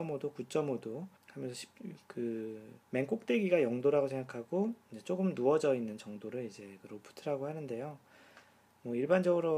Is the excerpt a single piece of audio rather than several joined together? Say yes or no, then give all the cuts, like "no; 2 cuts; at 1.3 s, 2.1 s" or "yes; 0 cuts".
no; 2 cuts; at 1.2 s, 2.8 s